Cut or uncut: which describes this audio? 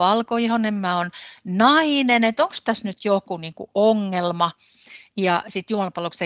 uncut